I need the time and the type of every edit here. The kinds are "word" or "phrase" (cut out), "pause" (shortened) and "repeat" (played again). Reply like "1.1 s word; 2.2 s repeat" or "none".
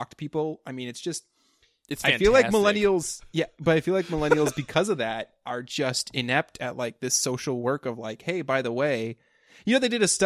none